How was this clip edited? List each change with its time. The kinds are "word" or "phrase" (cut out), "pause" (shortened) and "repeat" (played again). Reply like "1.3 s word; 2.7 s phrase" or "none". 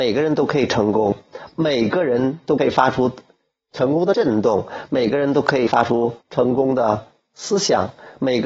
6.2 s pause